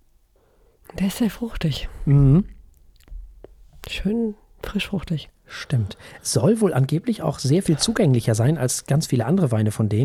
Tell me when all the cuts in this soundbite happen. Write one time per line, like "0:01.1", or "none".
none